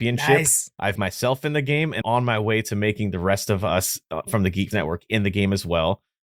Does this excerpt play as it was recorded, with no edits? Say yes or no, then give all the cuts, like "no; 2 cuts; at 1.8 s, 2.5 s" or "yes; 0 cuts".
no; 3 cuts; at 1.0 s, 2.0 s, 4.7 s